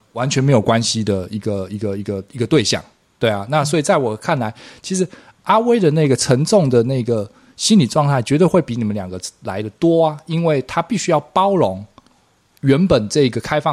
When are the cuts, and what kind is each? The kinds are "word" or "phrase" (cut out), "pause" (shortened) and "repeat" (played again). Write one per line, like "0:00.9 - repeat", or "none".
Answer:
none